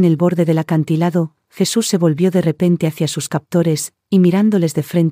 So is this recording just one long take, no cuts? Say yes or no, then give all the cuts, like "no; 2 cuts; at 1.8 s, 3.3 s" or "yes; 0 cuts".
yes; 0 cuts